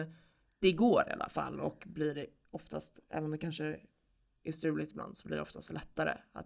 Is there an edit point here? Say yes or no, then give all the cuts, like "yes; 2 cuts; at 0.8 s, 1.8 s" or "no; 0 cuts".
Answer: no; 0 cuts